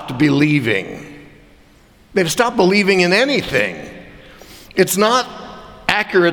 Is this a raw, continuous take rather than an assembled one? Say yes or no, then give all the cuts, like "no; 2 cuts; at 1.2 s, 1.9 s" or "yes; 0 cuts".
yes; 0 cuts